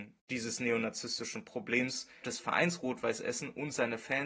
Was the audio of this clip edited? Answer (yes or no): yes